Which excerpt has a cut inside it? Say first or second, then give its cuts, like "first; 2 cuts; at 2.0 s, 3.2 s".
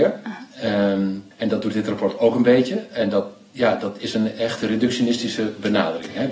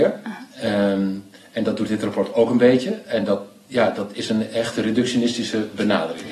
first; 1 cut; at 1.3 s